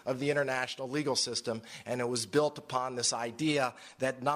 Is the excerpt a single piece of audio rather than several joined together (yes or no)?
yes